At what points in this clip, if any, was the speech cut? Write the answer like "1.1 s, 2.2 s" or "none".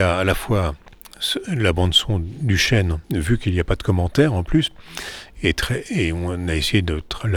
3.0 s